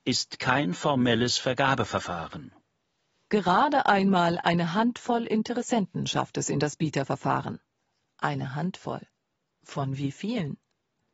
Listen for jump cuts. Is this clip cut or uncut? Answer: uncut